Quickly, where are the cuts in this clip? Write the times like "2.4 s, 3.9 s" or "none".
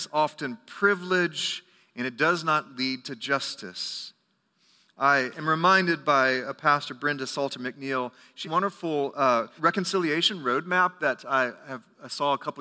8.4 s, 9.6 s